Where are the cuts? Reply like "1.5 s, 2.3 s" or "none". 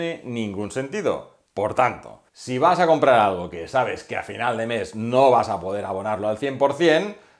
2.3 s

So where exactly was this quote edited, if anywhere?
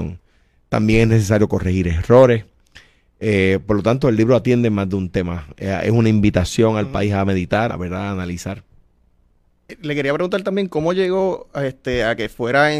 7.7 s

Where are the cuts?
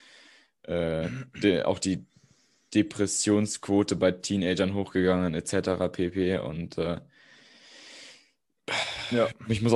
none

